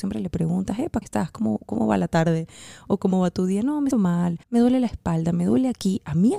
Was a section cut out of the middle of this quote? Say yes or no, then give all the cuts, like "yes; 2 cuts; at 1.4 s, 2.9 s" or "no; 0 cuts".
yes; 3 cuts; at 1.0 s, 3.9 s, 4.4 s